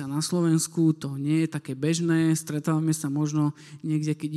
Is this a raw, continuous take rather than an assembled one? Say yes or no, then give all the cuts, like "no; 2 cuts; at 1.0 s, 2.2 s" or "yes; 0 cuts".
yes; 0 cuts